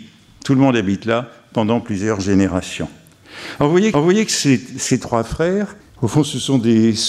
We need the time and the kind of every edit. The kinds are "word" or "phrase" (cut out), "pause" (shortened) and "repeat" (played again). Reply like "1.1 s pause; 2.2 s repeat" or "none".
3.9 s repeat; 5.8 s pause